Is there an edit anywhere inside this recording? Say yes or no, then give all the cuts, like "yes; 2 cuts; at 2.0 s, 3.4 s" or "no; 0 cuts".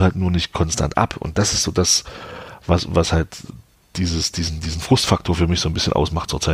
no; 0 cuts